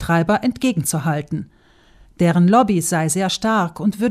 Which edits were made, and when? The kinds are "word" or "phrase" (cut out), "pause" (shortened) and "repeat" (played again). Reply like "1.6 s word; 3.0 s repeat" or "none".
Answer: none